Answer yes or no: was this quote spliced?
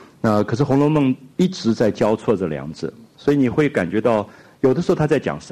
yes